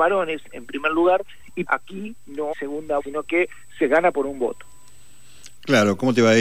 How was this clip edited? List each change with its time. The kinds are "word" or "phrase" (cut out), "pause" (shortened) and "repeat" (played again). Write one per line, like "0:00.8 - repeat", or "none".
0:01.7 - word
0:02.5 - word
0:03.0 - word